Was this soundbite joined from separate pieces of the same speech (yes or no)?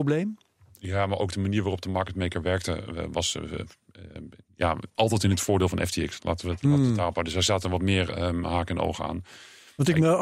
yes